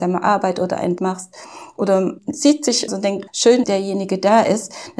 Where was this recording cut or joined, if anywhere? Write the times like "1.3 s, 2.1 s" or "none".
1.0 s, 2.2 s, 2.9 s, 3.3 s, 3.6 s